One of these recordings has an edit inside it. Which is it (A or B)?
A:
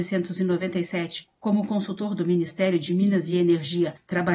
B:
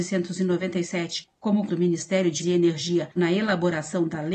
B